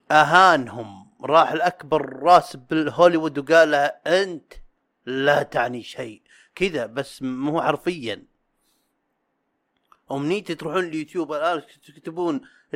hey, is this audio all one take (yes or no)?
yes